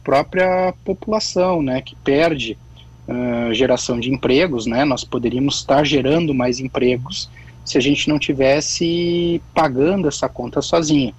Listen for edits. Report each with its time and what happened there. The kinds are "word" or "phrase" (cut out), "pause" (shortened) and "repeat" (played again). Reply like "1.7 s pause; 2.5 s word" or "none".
none